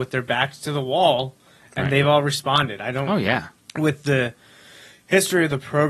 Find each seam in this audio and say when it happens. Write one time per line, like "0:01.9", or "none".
none